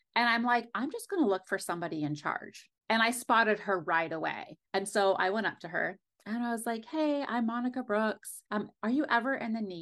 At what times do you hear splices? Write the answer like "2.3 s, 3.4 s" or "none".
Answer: 4.7 s, 8.5 s